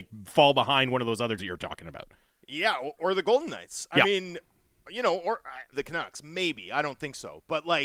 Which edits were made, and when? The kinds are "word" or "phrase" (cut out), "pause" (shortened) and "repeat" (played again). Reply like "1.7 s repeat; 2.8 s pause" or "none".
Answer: 1.4 s word; 3.0 s word; 5.7 s word